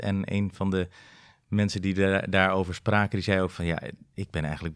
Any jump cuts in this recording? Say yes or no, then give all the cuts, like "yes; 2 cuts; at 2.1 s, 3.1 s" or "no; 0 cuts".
no; 0 cuts